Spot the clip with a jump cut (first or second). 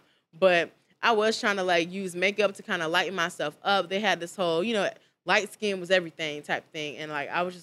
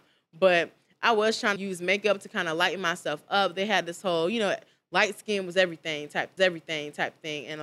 second